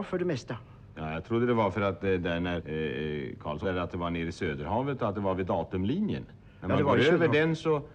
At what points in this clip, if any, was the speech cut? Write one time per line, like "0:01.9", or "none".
0:02.6
0:03.6